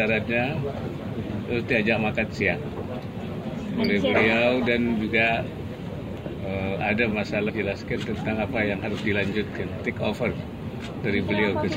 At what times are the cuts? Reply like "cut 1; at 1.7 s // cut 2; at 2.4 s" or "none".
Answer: cut 1; at 7.1 s // cut 2; at 7.5 s